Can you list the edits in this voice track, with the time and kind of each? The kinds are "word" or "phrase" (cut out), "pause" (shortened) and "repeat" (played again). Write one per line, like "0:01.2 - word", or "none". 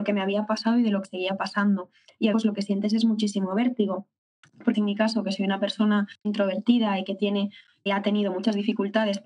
0:01.0 - word
0:02.3 - word
0:04.7 - word
0:06.2 - word
0:07.9 - word